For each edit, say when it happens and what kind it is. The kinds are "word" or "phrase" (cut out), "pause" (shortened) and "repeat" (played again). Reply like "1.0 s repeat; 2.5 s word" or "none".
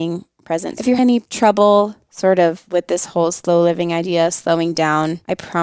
1.0 s word